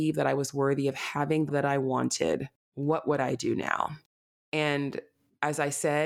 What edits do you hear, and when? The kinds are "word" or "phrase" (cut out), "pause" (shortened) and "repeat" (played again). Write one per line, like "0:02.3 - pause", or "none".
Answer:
0:01.5 - word